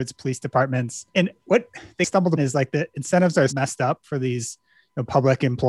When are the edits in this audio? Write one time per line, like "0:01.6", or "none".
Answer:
0:01.1
0:02.4
0:03.5